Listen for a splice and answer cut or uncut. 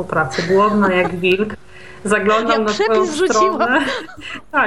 uncut